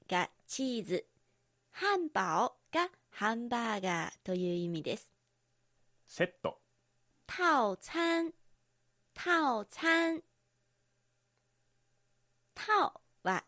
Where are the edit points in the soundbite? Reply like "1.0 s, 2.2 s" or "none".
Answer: 8.5 s

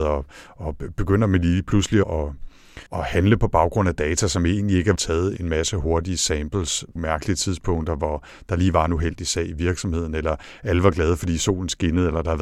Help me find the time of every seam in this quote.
2.0 s, 2.9 s, 5.0 s, 5.4 s, 7.0 s

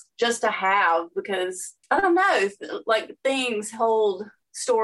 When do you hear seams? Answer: 1.8 s

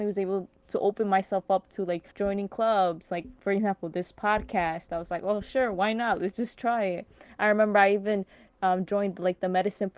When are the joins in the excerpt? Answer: 2.1 s

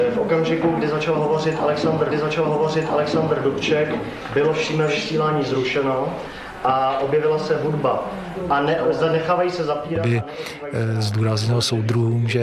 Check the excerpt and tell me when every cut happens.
2.1 s

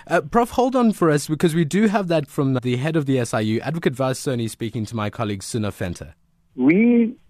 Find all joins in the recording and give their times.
2.3 s, 2.6 s

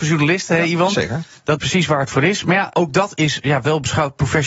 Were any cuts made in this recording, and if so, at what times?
1.6 s, 2.7 s

